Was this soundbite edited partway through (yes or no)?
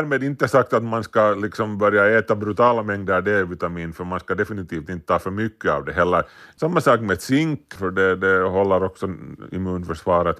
no